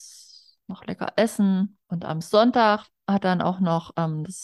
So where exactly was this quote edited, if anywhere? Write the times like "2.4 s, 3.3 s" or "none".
1.8 s